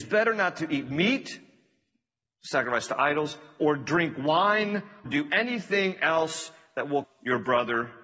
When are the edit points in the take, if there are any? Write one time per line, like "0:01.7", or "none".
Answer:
0:05.1
0:07.0